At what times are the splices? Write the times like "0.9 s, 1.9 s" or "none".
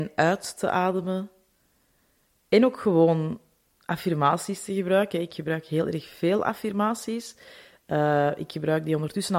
none